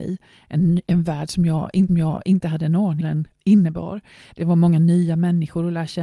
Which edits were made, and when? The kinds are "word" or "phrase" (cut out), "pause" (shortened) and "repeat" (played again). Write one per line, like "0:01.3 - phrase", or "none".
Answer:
0:01.9 - repeat
0:03.0 - phrase